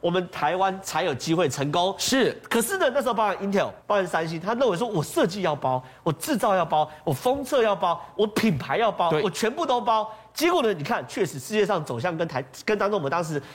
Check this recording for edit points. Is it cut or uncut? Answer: cut